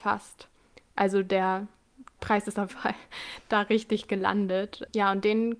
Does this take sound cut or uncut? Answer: cut